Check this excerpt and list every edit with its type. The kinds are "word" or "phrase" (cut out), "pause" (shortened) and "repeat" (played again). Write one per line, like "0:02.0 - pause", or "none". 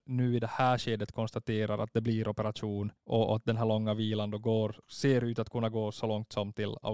0:03.0 - pause
0:04.8 - pause